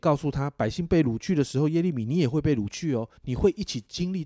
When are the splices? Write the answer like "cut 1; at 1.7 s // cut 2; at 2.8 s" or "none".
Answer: cut 1; at 3.2 s